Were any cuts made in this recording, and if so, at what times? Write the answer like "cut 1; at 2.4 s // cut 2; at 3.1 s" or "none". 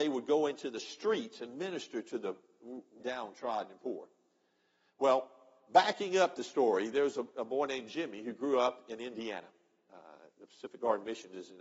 cut 1; at 3.0 s